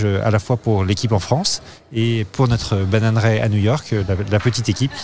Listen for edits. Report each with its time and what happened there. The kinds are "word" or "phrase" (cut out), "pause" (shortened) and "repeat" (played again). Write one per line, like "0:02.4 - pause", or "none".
none